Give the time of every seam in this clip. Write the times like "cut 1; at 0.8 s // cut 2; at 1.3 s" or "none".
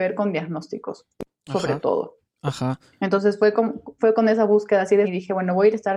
cut 1; at 5.0 s